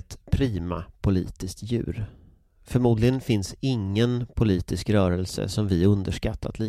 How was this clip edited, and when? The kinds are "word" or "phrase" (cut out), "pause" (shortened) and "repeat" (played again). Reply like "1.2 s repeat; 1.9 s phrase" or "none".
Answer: none